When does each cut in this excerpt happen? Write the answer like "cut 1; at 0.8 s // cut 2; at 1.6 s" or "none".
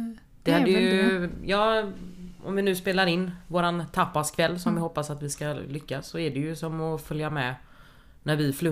none